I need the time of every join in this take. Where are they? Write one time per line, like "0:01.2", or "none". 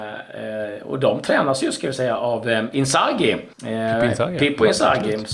0:03.5